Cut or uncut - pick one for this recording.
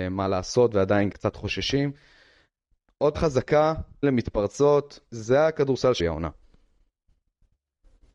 cut